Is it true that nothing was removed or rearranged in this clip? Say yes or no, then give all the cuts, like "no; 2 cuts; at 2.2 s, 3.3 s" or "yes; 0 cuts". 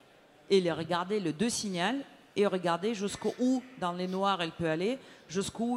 yes; 0 cuts